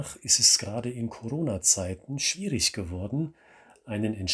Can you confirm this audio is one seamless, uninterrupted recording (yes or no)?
yes